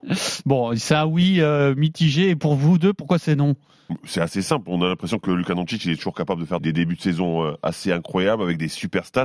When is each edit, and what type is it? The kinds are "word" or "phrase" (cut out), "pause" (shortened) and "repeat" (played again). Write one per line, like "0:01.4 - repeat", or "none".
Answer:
0:06.6 - word